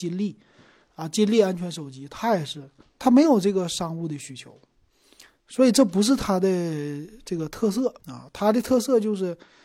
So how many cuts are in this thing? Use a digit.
2